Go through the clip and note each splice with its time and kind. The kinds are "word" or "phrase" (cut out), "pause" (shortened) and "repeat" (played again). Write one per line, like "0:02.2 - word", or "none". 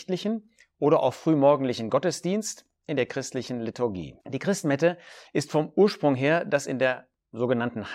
0:04.2 - pause